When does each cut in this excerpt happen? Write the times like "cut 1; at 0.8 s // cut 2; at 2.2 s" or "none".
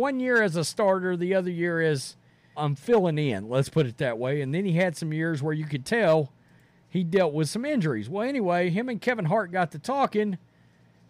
cut 1; at 2.6 s